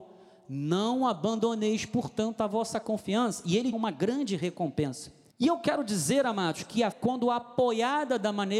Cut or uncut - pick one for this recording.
cut